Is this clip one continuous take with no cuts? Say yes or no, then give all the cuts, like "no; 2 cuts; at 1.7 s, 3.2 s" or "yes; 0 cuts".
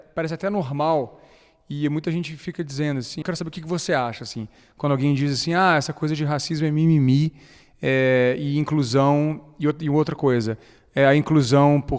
no; 1 cut; at 3.2 s